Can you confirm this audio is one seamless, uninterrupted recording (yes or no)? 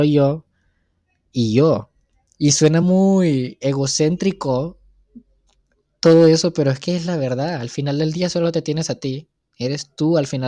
yes